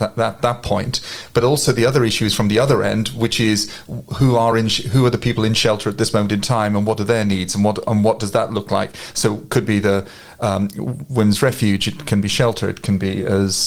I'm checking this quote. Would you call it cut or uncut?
uncut